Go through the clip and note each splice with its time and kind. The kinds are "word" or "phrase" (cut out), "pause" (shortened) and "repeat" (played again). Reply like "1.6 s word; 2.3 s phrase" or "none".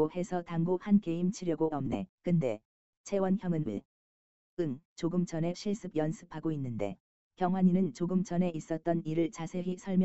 1.7 s word; 2.1 s pause; 4.9 s pause; 5.5 s word; 7.1 s pause